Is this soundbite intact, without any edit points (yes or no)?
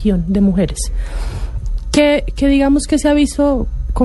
yes